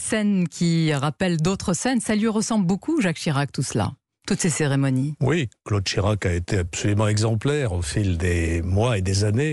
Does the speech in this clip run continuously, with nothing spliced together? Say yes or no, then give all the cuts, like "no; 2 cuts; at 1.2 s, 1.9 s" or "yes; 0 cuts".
yes; 0 cuts